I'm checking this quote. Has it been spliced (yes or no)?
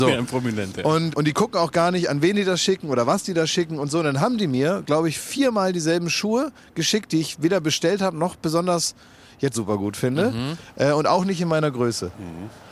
yes